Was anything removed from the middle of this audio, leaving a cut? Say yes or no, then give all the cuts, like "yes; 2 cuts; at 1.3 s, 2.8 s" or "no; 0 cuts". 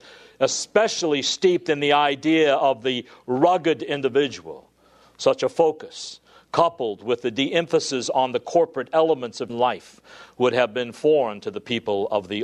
yes; 1 cut; at 9.5 s